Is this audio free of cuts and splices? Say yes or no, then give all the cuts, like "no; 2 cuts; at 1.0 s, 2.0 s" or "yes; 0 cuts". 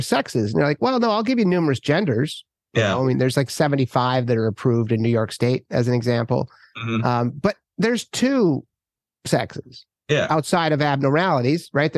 yes; 0 cuts